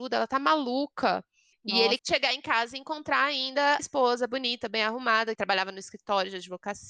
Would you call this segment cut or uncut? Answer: cut